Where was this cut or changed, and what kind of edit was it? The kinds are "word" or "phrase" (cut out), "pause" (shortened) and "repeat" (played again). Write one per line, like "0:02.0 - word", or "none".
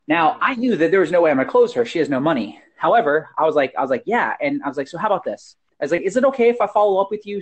0:05.7 - pause